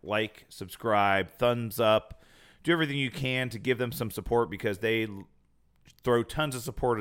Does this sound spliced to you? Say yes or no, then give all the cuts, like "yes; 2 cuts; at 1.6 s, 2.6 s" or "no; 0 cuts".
no; 0 cuts